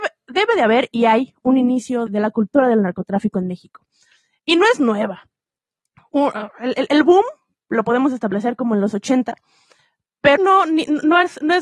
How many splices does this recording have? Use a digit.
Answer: 2